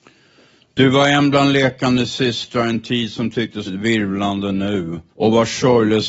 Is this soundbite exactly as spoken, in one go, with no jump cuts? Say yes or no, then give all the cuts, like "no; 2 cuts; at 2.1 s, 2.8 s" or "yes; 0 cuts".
no; 2 cuts; at 3.7 s, 5.1 s